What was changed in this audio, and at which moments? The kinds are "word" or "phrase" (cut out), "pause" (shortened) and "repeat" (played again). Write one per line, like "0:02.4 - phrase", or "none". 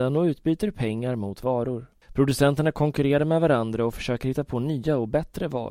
0:02.0 - pause

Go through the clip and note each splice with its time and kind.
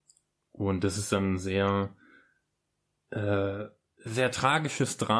none

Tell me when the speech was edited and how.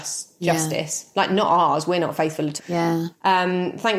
0:02.6 - word

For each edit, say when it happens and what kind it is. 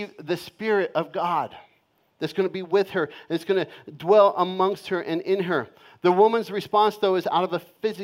none

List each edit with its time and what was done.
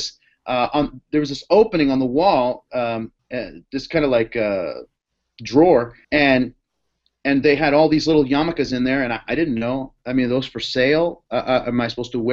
0:03.2 - pause
0:06.0 - pause

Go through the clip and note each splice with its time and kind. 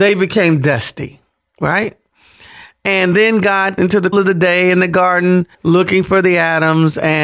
0:03.8 - word
0:04.1 - word
0:05.5 - pause

